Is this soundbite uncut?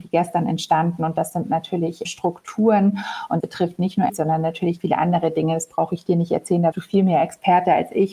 no; 5 cuts; at 2.0 s, 3.4 s, 4.1 s, 4.8 s, 6.7 s

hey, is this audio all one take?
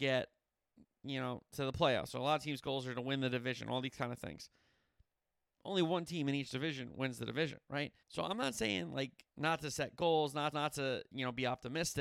no; 3 cuts; at 8.0 s, 9.3 s, 10.5 s

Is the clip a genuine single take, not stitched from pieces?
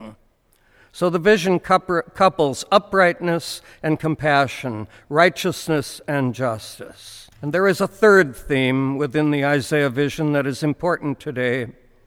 no; 1 cut; at 7.3 s

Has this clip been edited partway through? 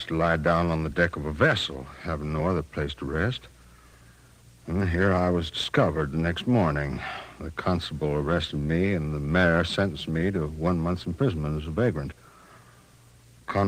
no; 0 cuts

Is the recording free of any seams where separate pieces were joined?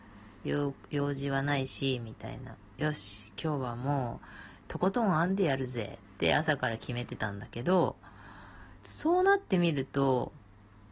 no; 2 cuts; at 6.0 s, 8.8 s

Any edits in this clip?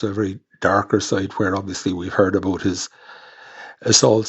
no; 0 cuts

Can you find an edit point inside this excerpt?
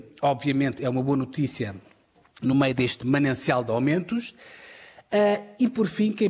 no; 0 cuts

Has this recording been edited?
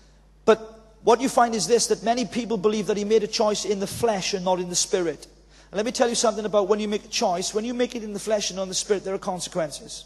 no; 0 cuts

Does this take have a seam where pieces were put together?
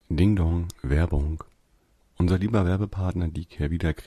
no; 0 cuts

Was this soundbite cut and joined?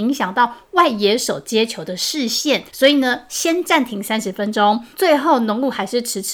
yes; 2 cuts; at 2.7 s, 4.9 s

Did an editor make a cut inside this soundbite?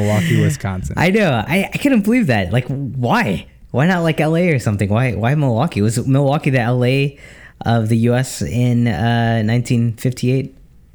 no; 0 cuts

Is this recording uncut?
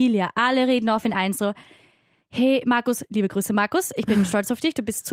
yes; 0 cuts

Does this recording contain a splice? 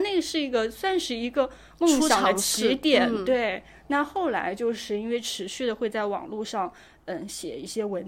no; 0 cuts

